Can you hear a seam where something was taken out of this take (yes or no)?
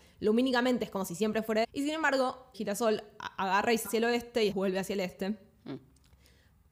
yes